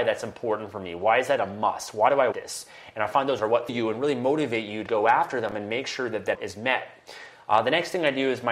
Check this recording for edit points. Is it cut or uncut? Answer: cut